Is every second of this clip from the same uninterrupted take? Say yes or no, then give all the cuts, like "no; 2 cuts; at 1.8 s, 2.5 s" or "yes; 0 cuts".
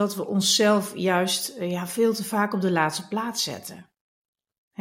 yes; 0 cuts